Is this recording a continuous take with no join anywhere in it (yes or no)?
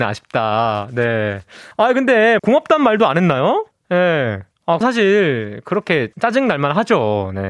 no